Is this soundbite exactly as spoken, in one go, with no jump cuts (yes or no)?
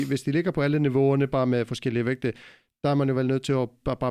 yes